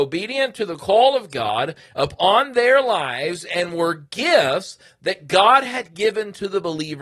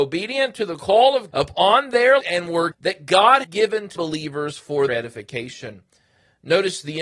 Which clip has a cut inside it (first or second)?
second